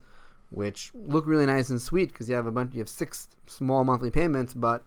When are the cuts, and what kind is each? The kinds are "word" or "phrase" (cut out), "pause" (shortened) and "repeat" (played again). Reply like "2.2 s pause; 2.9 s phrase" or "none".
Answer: none